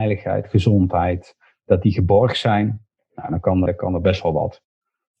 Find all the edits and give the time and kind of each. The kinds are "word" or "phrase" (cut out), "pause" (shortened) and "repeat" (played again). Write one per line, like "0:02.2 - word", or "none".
0:03.7 - word

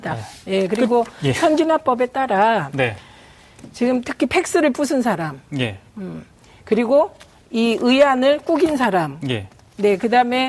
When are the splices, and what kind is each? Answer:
none

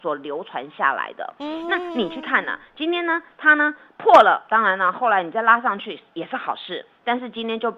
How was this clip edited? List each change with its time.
none

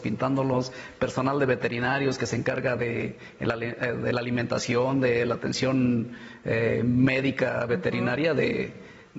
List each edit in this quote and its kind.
none

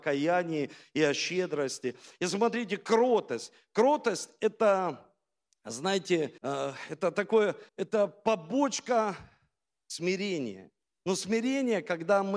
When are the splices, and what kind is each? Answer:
0:06.4 - pause
0:07.7 - pause
0:10.8 - pause

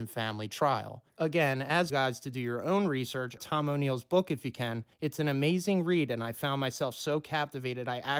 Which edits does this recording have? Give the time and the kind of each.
0:01.1 - pause
0:01.9 - phrase
0:03.4 - phrase
0:04.9 - pause

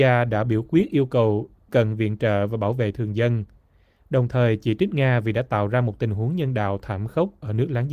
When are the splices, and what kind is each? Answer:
0:01.7 - word

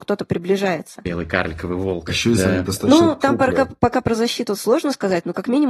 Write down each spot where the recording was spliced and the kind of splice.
0:02.4 - phrase

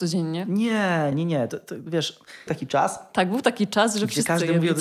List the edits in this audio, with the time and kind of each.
0:01.1 - word
0:02.5 - word

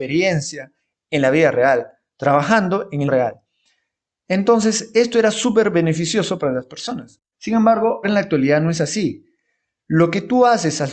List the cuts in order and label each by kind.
0:03.1 - word
0:07.3 - pause
0:08.0 - word

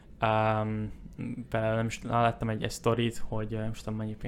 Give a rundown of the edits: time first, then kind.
none

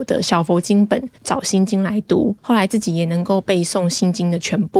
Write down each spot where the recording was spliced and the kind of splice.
0:01.2 - pause
0:02.4 - pause

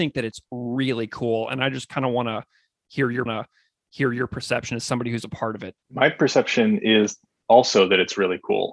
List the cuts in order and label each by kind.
0:03.3 - repeat
0:05.8 - pause

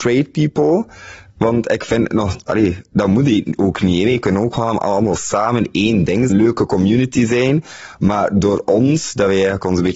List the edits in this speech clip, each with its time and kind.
0:06.3 - phrase

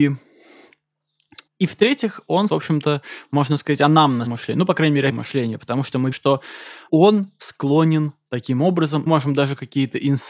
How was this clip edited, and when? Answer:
0:01.5 - pause
0:02.5 - word
0:04.3 - word
0:05.1 - phrase
0:06.1 - word
0:06.9 - word
0:08.3 - word
0:09.1 - word

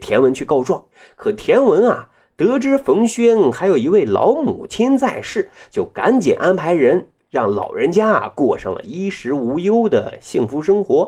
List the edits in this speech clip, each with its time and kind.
0:00.9 - pause

